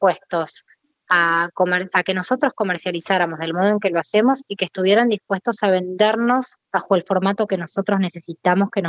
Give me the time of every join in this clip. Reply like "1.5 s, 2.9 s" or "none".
6.6 s